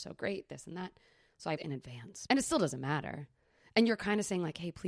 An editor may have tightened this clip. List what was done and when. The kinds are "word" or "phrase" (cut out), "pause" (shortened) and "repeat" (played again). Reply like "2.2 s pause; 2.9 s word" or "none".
1.6 s word; 2.3 s word